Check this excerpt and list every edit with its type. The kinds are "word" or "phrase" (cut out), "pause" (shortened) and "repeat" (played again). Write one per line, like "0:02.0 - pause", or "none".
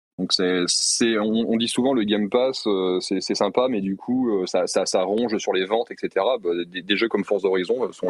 0:04.5 - word